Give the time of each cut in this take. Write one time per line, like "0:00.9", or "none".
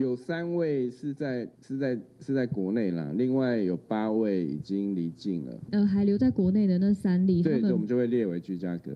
0:01.5